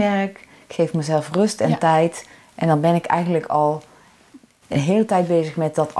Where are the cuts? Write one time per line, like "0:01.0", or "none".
none